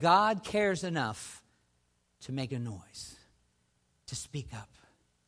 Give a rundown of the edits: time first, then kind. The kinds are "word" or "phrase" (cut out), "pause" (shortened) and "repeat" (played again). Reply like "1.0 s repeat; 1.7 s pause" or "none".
none

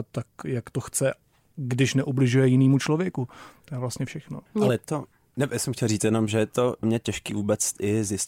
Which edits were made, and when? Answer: 4.5 s pause; 6.8 s word

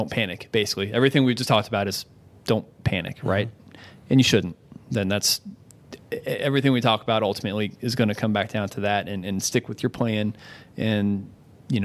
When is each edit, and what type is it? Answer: none

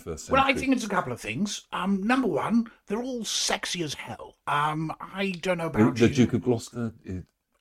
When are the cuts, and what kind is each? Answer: 4.4 s pause

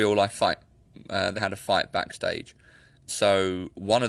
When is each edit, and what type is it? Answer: 1.4 s word; 3.1 s word

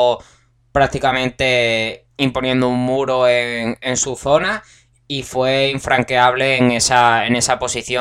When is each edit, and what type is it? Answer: 2.1 s pause

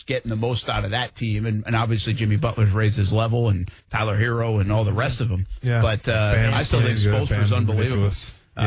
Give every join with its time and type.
3.8 s pause

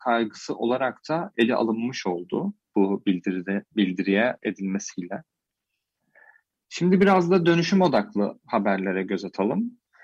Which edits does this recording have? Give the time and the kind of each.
4.4 s word

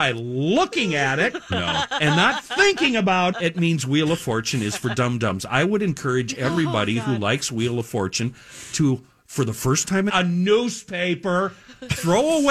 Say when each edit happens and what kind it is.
3.3 s word; 10.1 s phrase

